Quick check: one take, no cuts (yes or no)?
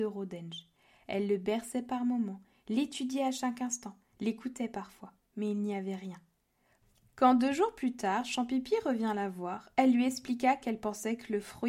yes